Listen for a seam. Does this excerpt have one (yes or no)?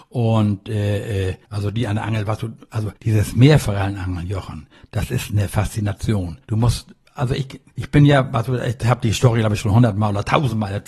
yes